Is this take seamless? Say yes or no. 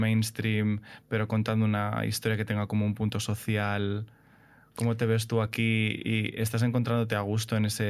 yes